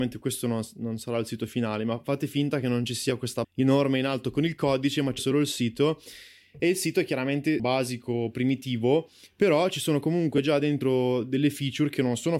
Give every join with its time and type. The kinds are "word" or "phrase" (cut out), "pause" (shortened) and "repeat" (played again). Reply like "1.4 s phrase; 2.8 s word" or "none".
3.4 s word; 5.2 s word; 7.6 s word